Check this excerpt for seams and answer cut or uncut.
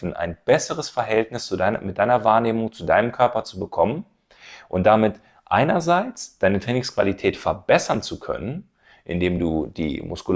uncut